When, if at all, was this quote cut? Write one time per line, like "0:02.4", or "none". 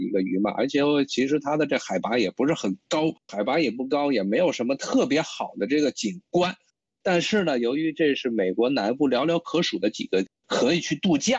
0:03.2